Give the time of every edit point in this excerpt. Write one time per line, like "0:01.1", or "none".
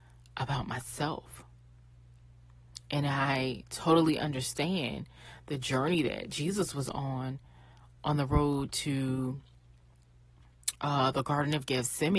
none